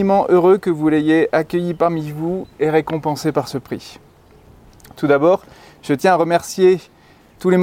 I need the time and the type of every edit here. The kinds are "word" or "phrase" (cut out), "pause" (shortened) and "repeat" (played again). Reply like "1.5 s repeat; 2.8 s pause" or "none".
none